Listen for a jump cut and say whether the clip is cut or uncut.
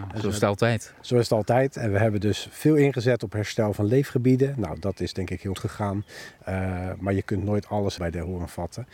cut